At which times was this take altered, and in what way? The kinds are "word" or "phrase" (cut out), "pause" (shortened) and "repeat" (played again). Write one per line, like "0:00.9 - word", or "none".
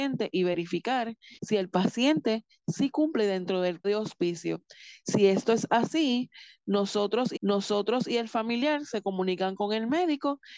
0:01.4 - pause
0:03.8 - word
0:07.4 - repeat